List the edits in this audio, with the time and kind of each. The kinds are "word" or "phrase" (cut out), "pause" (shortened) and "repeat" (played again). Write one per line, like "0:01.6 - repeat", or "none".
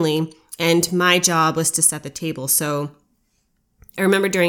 none